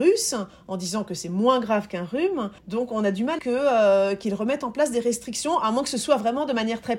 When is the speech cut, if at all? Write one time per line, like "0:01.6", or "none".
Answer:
0:02.6
0:03.4